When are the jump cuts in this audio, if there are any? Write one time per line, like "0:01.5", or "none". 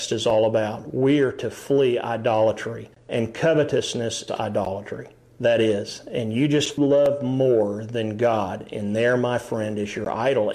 0:02.9
0:04.3
0:06.8